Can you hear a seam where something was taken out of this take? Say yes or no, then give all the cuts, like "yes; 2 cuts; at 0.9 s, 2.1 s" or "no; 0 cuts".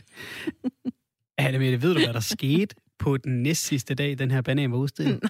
no; 0 cuts